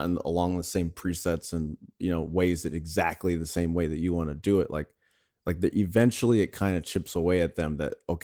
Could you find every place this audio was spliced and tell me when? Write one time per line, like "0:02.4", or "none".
none